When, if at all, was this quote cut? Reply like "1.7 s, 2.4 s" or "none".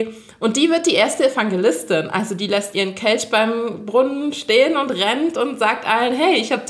none